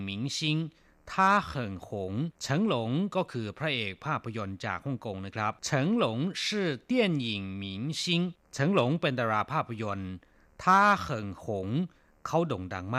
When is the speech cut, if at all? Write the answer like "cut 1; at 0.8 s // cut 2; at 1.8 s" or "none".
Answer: cut 1; at 2.3 s // cut 2; at 5.6 s // cut 3; at 8.4 s